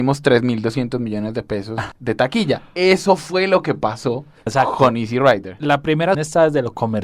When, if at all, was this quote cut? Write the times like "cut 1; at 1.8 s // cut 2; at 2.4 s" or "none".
cut 1; at 4.5 s // cut 2; at 6.1 s